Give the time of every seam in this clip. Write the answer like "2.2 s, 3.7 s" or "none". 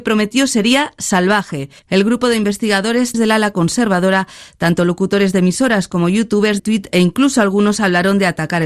1.8 s, 3.1 s, 6.6 s